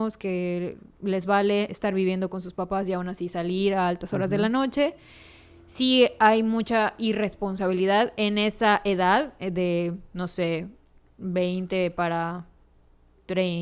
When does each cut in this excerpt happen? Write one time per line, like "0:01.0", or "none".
none

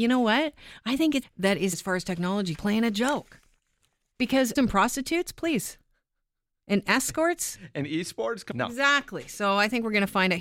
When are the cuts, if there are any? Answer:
0:01.2
0:01.7
0:02.5
0:04.6
0:08.5

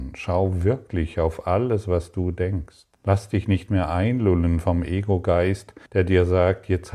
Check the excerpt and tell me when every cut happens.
0:02.9
0:05.9

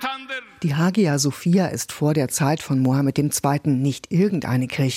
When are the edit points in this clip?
none

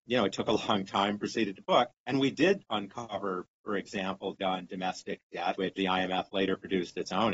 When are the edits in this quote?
0:01.5
0:02.0
0:04.4
0:05.8

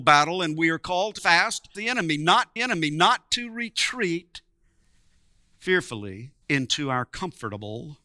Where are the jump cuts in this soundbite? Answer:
0:01.2
0:01.7
0:02.6
0:06.4

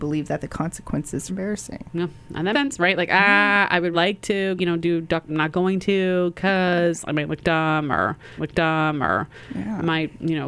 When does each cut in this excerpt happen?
0:01.3
0:02.5
0:03.9
0:04.6
0:05.3
0:08.4

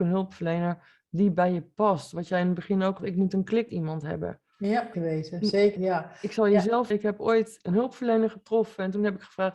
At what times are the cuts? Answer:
0:03.0
0:03.7
0:04.9
0:05.8
0:06.9
0:07.6

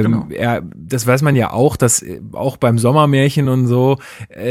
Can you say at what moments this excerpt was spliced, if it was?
none

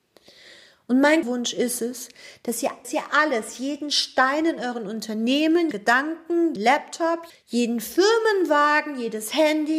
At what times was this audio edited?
0:01.2
0:02.8
0:05.7
0:06.6
0:07.3

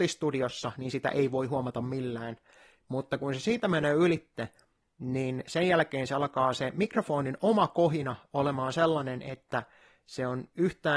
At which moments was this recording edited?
none

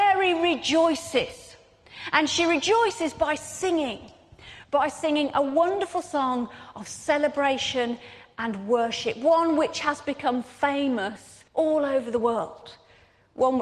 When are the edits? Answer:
0:11.5

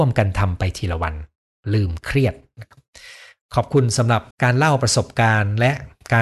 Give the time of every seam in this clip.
0:04.3

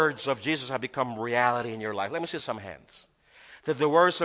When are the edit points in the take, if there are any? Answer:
none

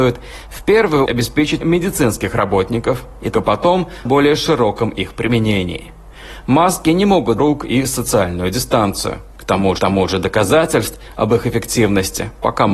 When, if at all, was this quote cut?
0:01.1
0:01.6
0:03.3
0:04.0
0:07.4
0:09.8

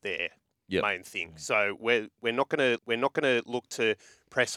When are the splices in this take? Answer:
0:02.8

